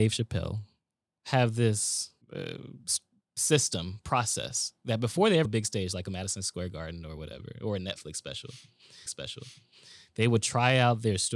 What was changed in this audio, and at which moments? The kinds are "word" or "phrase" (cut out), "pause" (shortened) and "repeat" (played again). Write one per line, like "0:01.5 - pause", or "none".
0:02.2 - pause
0:05.4 - word
0:09.1 - repeat